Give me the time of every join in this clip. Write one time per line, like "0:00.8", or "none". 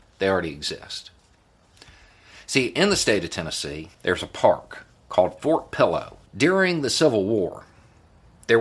0:03.9
0:06.3